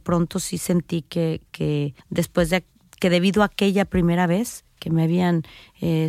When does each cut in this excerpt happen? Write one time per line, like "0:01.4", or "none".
0:02.0